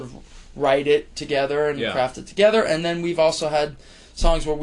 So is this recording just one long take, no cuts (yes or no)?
yes